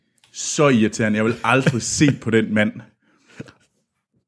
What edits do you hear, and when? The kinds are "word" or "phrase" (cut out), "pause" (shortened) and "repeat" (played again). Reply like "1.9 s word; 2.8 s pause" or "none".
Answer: none

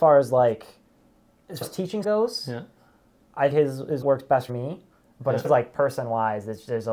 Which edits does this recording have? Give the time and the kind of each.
1.6 s word; 2.0 s word; 3.5 s word; 4.0 s word; 4.5 s word; 5.4 s word

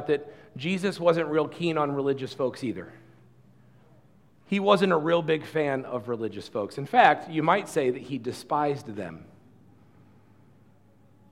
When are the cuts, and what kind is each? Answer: none

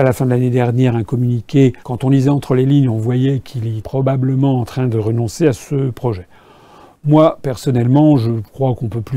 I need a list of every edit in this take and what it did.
1.8 s pause; 3.8 s word

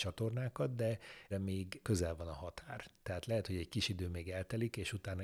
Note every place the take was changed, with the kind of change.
1.3 s word; 1.8 s phrase

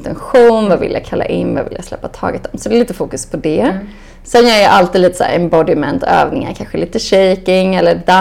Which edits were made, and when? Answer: none

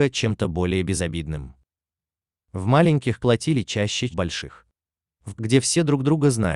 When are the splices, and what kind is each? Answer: 3.2 s word; 4.1 s word; 5.4 s word

